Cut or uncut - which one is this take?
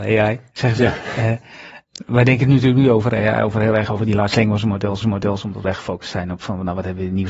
cut